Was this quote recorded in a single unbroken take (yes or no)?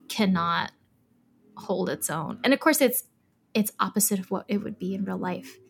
yes